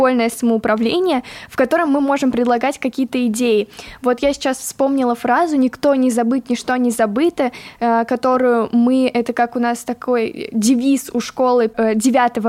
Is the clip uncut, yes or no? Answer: yes